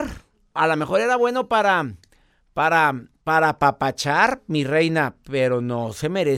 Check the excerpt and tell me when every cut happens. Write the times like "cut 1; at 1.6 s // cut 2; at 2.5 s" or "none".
none